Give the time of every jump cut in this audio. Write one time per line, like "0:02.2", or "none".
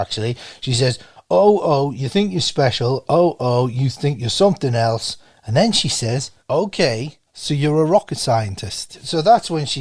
0:06.4

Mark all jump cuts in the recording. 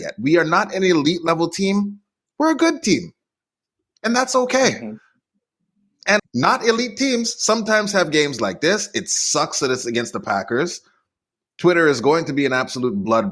0:06.2

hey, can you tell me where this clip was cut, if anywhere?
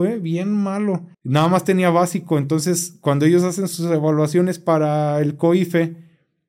0:01.1

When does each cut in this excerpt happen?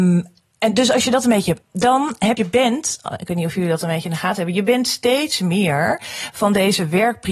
0:01.6
0:02.4

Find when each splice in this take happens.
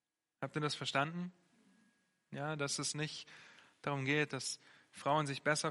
none

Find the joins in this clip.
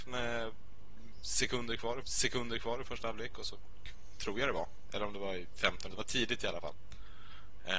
0:02.0
0:05.9

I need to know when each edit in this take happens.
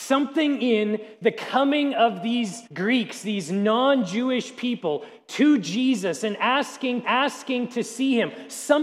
0:02.7
0:07.0

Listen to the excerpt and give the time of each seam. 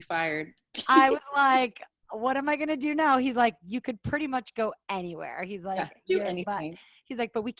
none

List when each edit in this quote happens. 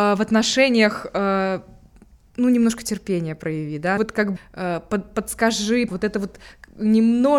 0:04.0
0:04.4
0:05.9

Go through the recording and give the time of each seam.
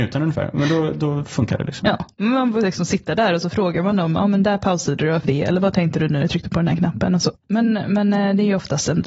0:05.2
0:06.2

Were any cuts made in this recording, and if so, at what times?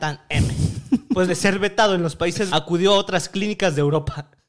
0:01.3
0:02.5

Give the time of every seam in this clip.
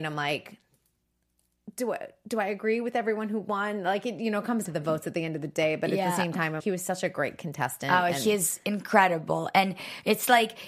0:04.6
0:06.6

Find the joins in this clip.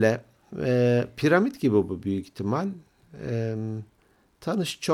none

